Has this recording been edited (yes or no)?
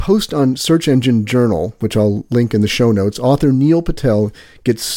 no